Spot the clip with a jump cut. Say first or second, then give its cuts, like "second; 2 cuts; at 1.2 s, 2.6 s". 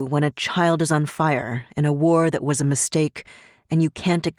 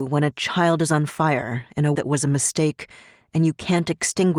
second; 1 cut; at 1.9 s